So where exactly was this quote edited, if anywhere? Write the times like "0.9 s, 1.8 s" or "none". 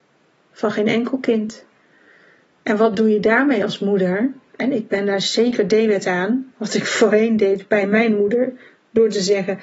none